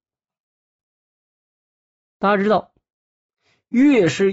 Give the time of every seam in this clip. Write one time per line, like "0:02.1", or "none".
none